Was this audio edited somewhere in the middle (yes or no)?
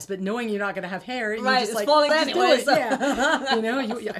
yes